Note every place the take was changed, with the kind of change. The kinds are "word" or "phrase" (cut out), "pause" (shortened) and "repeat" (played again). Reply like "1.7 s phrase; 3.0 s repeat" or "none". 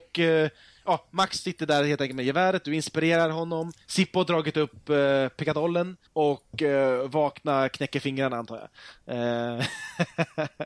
6.1 s pause